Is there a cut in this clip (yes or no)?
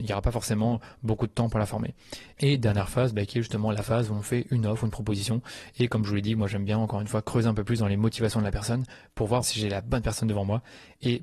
yes